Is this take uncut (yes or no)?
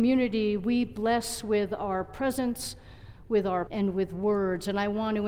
no